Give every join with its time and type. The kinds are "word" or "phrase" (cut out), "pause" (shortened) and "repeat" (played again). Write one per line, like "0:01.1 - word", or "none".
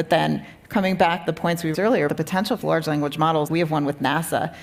0:01.3 - word
0:01.7 - word
0:02.1 - word
0:02.6 - word
0:03.5 - word